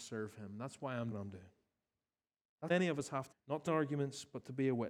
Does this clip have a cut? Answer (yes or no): yes